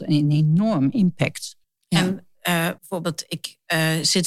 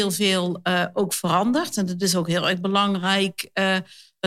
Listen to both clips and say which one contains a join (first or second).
first